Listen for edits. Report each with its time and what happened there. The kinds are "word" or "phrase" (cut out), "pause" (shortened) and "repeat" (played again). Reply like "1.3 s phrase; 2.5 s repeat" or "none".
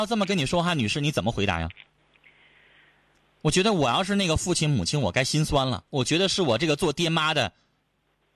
5.9 s pause